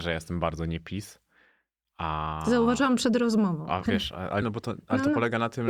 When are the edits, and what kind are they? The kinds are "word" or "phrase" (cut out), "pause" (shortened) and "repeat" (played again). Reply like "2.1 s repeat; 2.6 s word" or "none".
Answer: 3.9 s word; 4.4 s word